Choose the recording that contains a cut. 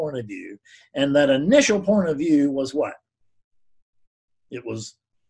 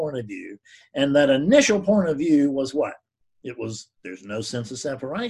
second; 2 cuts; at 3.2 s, 4.0 s

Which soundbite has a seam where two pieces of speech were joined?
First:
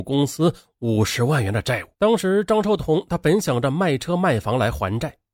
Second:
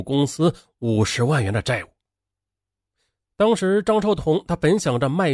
first; 1 cut; at 1.9 s

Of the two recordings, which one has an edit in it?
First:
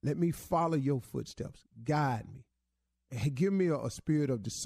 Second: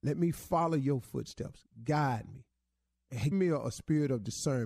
second; 1 cut; at 3.3 s

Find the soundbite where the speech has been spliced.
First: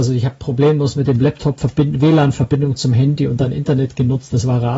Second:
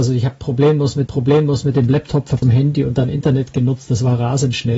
second; 2 cuts; at 1.1 s, 2.4 s

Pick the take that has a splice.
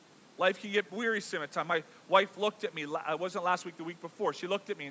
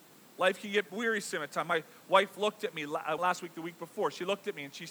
second; 1 cut; at 3.2 s

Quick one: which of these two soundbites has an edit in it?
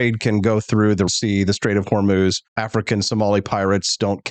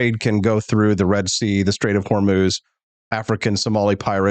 first; 2 cuts; at 1.1 s, 2.5 s

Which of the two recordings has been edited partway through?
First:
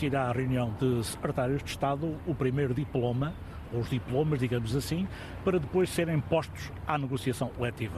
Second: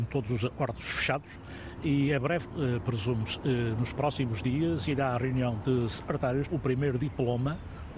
second; 2 cuts; at 2.5 s, 6.5 s

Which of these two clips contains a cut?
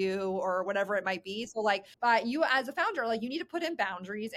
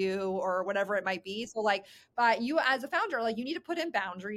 first; 1 cut; at 1.9 s

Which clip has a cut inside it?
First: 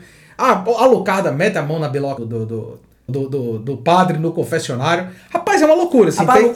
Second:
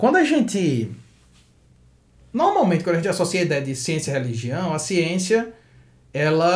first; 2 cuts; at 2.2 s, 3.1 s

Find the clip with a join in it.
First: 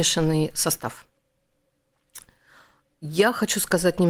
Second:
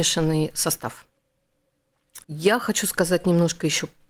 second; 1 cut; at 2.2 s

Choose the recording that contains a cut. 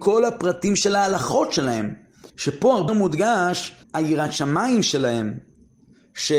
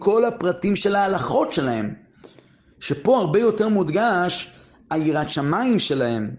first; 3 cuts; at 2.3 s, 2.9 s, 3.8 s

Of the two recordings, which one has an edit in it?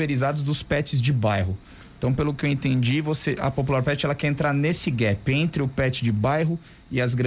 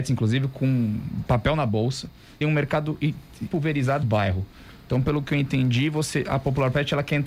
second; 3 cuts; at 2.4 s, 3.5 s, 4.0 s

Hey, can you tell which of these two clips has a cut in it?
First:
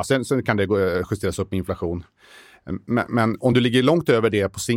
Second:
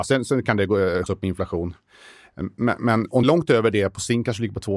second; 2 cuts; at 1.1 s, 3.2 s

